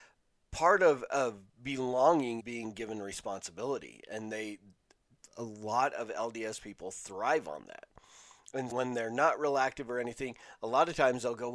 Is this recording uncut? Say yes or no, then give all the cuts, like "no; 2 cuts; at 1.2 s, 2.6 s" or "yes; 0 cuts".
no; 2 cuts; at 2.4 s, 8.7 s